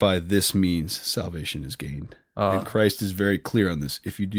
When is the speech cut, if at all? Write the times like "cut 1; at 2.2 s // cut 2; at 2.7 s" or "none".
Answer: none